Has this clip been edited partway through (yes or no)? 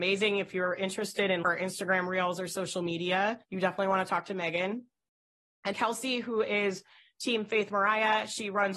yes